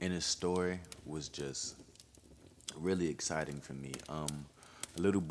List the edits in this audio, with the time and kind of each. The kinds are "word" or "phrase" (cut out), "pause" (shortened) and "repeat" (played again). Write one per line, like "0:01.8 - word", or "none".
none